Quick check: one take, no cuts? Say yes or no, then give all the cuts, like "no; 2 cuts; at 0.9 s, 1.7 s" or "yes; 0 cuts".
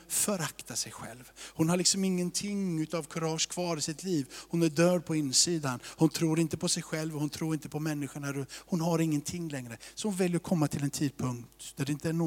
yes; 0 cuts